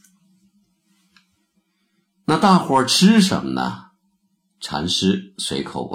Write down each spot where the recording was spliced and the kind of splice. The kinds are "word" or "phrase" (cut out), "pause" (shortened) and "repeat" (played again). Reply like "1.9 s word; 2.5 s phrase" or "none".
none